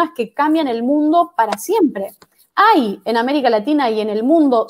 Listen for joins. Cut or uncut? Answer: uncut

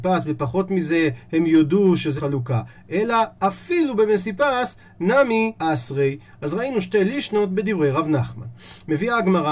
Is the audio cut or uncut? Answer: cut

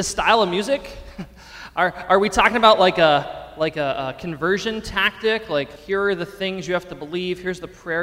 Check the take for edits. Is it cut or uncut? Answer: cut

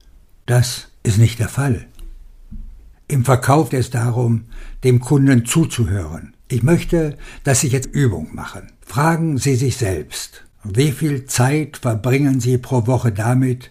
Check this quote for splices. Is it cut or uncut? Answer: cut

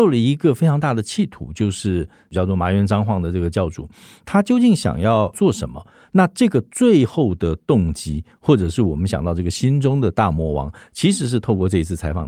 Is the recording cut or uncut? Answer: uncut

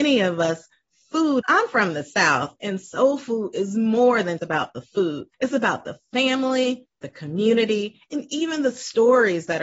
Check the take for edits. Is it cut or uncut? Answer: cut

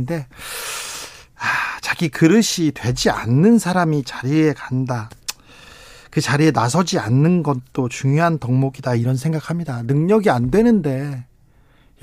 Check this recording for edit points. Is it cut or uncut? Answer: uncut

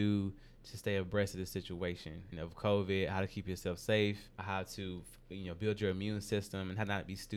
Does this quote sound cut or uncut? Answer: cut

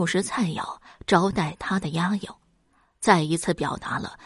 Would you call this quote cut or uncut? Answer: uncut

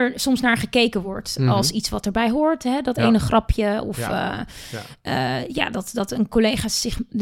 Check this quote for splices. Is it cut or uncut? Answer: uncut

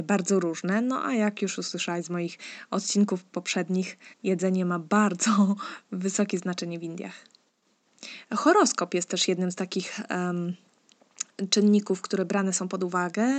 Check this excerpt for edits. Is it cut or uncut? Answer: cut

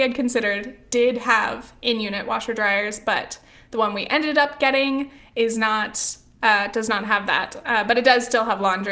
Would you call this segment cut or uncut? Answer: uncut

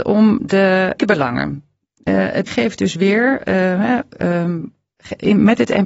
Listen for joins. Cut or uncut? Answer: cut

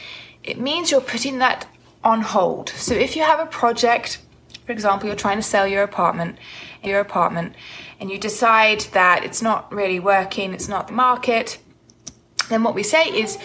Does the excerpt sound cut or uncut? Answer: cut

